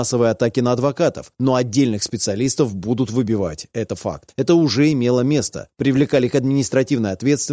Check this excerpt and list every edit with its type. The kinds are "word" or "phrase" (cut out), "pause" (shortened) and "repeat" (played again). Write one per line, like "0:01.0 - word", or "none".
none